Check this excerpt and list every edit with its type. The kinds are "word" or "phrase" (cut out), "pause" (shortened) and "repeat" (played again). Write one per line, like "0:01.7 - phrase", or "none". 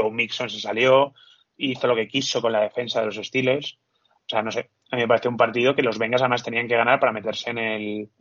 none

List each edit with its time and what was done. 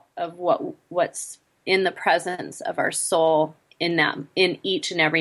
none

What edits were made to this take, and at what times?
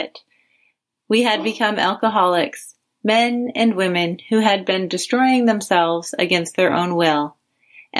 none

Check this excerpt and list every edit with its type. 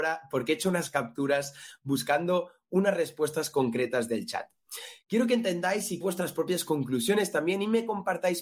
0:06.0 - phrase

